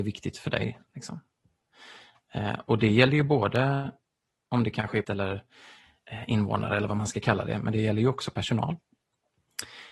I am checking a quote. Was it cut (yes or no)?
yes